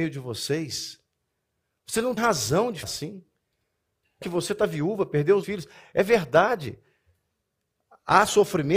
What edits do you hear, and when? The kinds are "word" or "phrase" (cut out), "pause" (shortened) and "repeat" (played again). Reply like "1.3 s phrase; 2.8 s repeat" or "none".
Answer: 2.2 s word; 2.8 s word; 4.2 s word; 5.4 s word